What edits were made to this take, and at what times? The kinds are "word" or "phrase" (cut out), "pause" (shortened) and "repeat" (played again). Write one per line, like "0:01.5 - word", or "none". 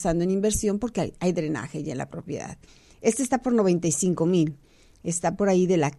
none